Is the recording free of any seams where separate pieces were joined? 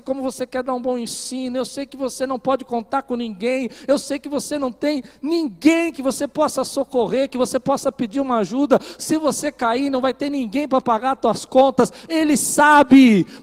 yes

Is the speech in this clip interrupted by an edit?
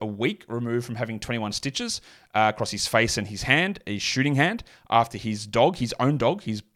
no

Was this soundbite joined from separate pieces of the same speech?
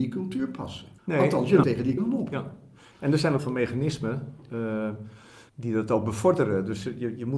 yes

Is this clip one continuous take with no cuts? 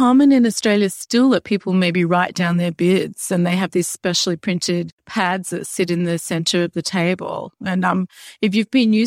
yes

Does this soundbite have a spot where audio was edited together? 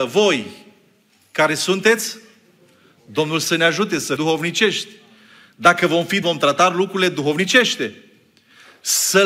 yes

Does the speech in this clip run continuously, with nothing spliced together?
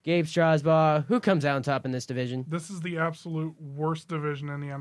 yes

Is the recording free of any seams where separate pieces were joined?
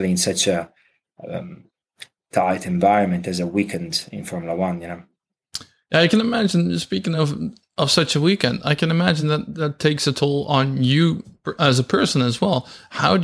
yes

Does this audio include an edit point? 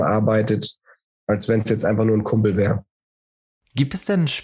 no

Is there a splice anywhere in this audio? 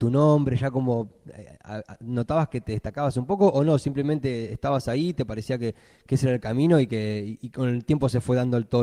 no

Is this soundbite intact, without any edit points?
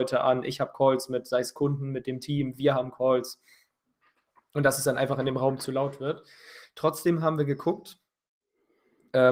yes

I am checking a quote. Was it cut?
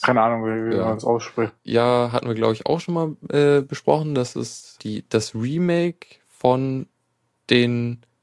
yes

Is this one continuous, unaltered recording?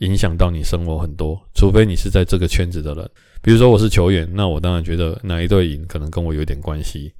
no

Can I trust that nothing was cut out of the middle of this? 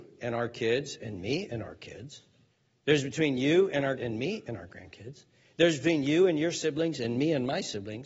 no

